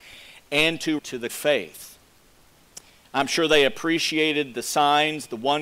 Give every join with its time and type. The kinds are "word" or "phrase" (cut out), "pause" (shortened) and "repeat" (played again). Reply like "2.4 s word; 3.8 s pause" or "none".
1.0 s phrase; 1.3 s phrase